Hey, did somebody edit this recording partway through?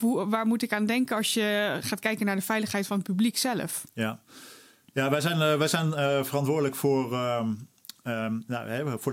no; 0 cuts

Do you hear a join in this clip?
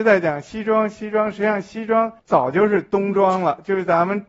yes; 1 cut; at 2.2 s

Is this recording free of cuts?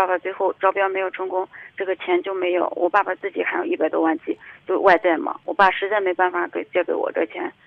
yes; 0 cuts

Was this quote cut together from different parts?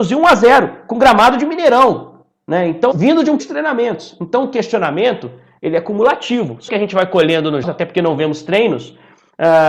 yes; 4 cuts; at 2.9 s, 3.4 s, 6.7 s, 7.6 s

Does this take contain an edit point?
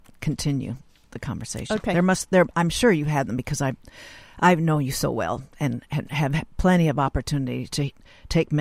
no; 0 cuts

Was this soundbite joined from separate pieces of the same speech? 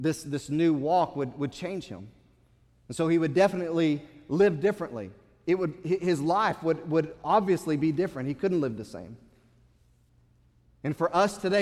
no; 0 cuts

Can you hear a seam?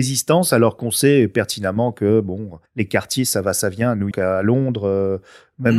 yes; 2 cuts; at 2.7 s, 4.1 s

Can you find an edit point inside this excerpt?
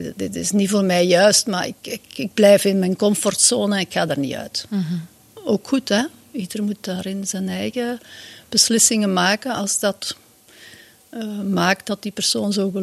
no; 0 cuts

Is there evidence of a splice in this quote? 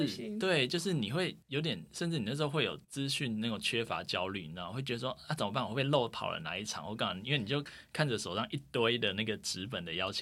yes; 2 cuts; at 1.4 s, 2.8 s

